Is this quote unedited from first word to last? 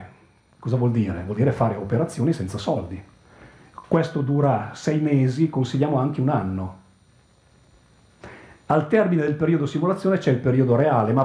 yes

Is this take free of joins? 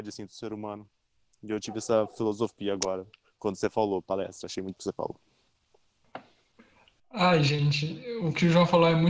no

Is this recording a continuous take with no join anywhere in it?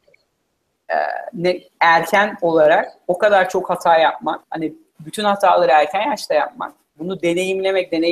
no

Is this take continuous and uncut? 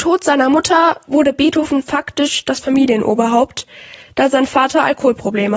yes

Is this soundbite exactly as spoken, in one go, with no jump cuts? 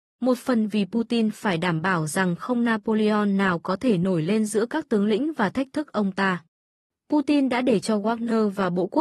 yes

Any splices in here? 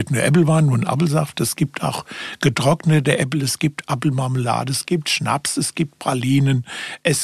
no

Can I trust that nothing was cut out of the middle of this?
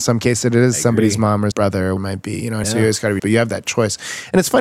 no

